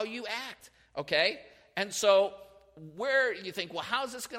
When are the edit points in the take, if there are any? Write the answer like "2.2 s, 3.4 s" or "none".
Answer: none